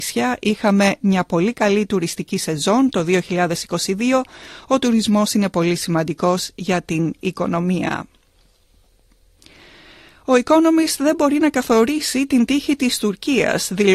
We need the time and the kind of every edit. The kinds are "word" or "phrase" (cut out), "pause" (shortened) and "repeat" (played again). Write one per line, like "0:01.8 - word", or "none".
none

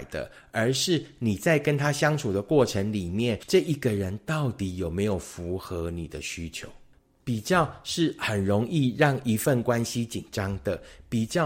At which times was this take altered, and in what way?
none

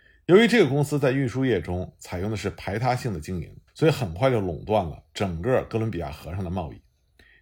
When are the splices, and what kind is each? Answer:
0:03.7 - pause

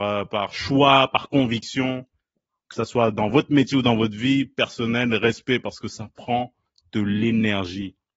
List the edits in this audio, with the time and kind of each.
none

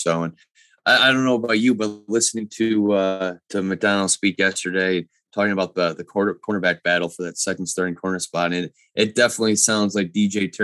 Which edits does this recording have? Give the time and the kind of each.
0:03.4 - pause

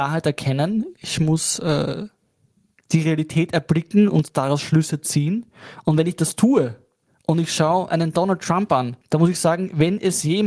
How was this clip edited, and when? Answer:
0:09.0 - pause

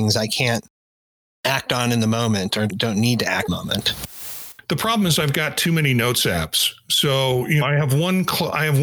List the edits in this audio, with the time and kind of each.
0:02.7 - word
0:03.5 - phrase
0:07.6 - word

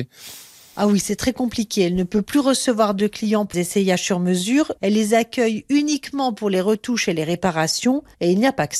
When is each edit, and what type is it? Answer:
0:03.5 - word

